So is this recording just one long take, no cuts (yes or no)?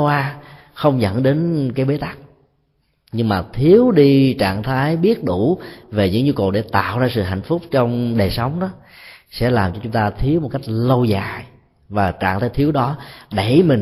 yes